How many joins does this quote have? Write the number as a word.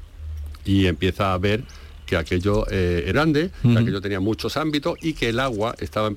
one